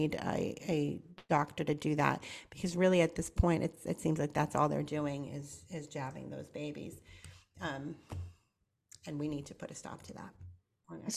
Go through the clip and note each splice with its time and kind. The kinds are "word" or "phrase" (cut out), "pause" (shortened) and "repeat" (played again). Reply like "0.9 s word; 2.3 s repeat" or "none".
none